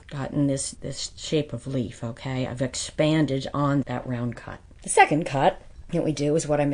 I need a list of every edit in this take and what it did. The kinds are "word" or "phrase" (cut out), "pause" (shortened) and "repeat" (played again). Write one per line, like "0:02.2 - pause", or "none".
0:03.8 - word